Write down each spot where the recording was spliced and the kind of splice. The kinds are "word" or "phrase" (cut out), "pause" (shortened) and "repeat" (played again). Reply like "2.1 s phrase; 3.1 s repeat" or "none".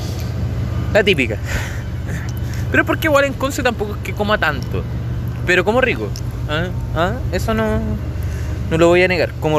none